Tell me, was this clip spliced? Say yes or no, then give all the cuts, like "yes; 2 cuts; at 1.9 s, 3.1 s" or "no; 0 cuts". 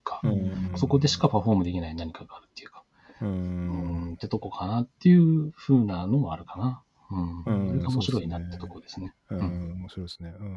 no; 0 cuts